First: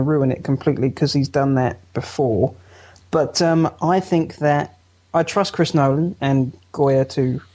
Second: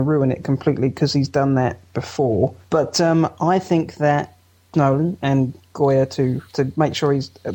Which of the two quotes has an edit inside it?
second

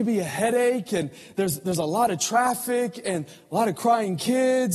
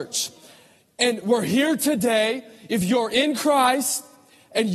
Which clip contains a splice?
second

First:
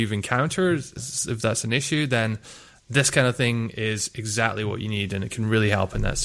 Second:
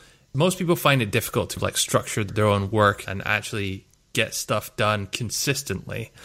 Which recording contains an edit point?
second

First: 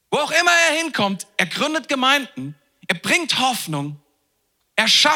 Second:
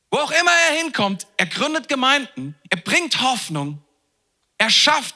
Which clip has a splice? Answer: second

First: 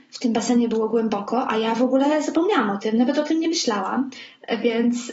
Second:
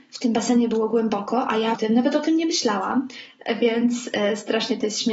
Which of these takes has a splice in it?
second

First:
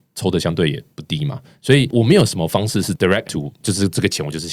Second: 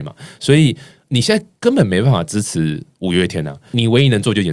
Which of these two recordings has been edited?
first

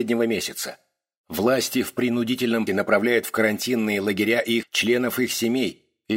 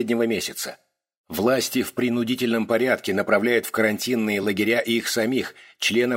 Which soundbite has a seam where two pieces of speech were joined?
first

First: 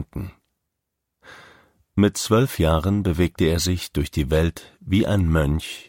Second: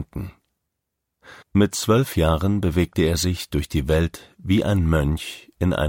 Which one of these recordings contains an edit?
second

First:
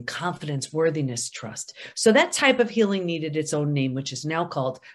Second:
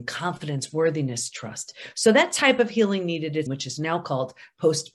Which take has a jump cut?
second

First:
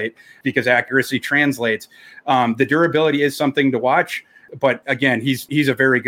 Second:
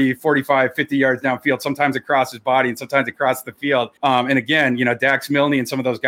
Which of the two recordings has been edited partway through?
second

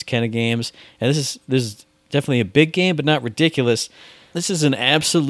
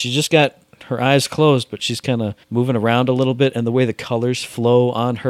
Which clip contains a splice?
second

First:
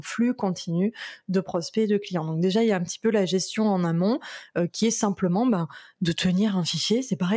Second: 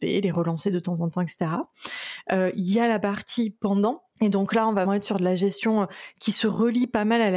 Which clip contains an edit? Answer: second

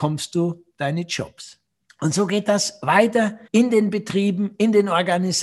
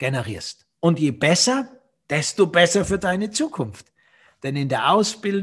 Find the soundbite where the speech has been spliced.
first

